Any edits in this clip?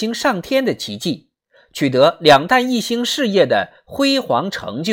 no; 0 cuts

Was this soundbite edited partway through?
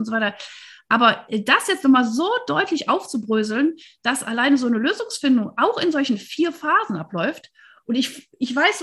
no; 0 cuts

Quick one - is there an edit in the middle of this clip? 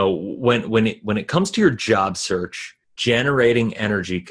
no; 0 cuts

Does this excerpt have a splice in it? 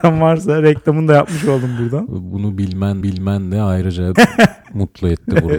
yes; 2 cuts; at 3.0 s, 4.2 s

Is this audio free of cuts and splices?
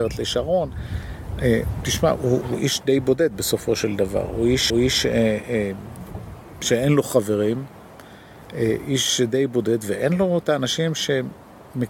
no; 2 cuts; at 2.4 s, 4.7 s

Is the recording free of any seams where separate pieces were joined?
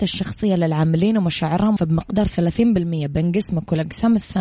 no; 1 cut; at 1.8 s

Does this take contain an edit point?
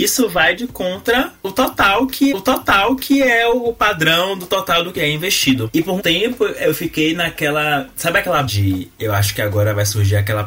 yes; 4 cuts; at 2.3 s, 5.0 s, 6.0 s, 8.5 s

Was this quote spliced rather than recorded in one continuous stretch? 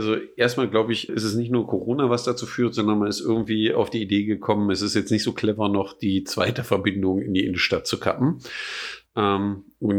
yes; 1 cut; at 1.1 s

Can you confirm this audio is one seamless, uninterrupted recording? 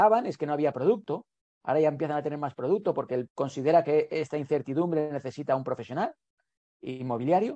no; 1 cut; at 3.3 s

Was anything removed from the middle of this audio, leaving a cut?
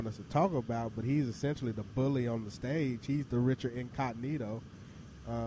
no; 0 cuts

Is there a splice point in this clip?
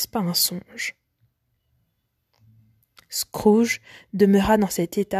no; 0 cuts

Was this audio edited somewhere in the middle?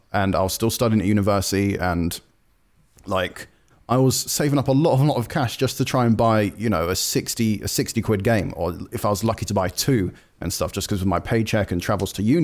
no; 0 cuts

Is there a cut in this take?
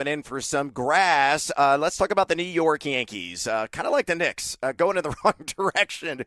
no; 0 cuts

